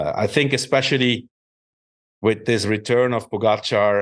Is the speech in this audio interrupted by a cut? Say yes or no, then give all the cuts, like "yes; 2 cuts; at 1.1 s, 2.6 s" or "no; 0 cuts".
no; 0 cuts